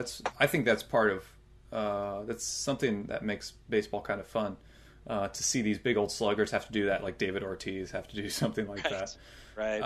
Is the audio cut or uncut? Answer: uncut